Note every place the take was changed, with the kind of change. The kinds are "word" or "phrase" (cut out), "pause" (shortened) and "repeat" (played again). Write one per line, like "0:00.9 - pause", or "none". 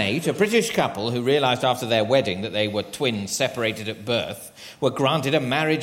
none